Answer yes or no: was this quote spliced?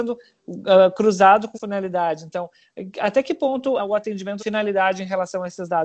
yes